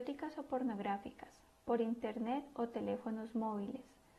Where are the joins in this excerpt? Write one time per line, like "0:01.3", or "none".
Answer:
none